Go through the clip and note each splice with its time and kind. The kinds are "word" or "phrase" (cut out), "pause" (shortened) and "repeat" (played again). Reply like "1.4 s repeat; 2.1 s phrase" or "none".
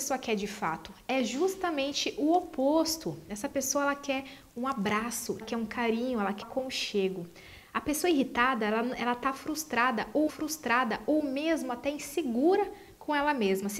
5.4 s word; 6.4 s word; 10.3 s repeat